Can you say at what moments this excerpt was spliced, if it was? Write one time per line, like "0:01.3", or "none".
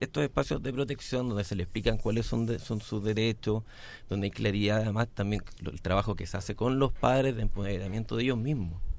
none